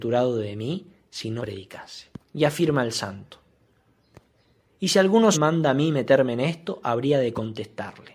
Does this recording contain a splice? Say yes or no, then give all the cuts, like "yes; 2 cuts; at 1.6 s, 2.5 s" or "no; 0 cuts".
yes; 3 cuts; at 1.4 s, 2.2 s, 5.3 s